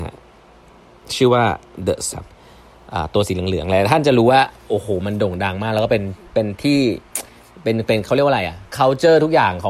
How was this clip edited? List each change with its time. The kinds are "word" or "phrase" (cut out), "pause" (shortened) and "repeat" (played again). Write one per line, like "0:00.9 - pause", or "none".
0:02.1 - word